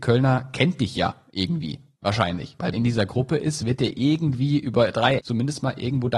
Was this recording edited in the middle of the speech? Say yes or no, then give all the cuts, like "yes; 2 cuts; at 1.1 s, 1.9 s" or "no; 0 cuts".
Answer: yes; 2 cuts; at 2.7 s, 5.2 s